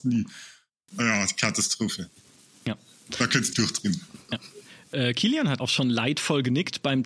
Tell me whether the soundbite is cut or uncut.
cut